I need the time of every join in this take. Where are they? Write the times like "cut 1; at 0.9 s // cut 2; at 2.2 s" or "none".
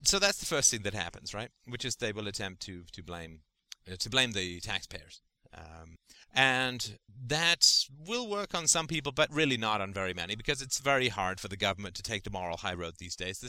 none